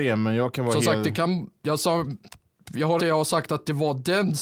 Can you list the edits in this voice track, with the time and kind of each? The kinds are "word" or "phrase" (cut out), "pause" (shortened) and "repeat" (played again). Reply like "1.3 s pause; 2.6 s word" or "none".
3.0 s word